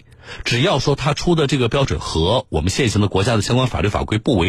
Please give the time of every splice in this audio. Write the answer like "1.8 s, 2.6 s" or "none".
none